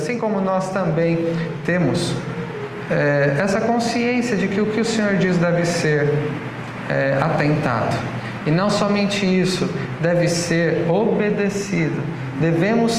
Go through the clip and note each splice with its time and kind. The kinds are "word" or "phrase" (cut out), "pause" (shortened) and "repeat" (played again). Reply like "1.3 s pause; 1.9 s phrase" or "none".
none